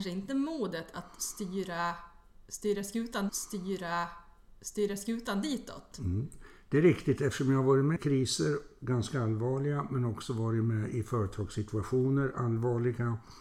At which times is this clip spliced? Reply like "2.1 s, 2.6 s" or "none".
3.3 s, 8.0 s

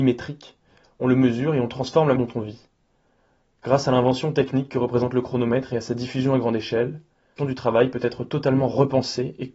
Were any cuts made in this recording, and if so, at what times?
2.2 s, 7.4 s

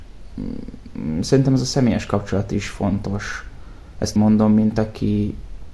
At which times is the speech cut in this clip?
4.2 s

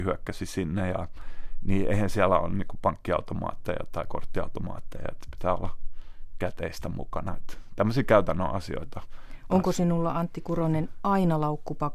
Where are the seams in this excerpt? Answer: none

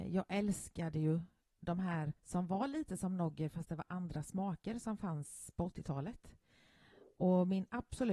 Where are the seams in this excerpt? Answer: 2.2 s

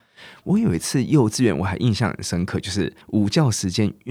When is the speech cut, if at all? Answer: 3.0 s

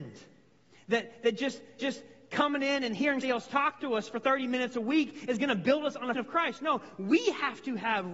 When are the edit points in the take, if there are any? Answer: 1.8 s, 3.2 s, 6.1 s

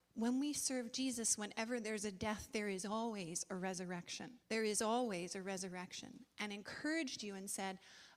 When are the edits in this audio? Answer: 4.4 s

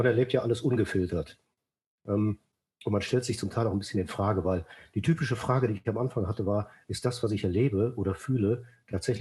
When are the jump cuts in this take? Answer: none

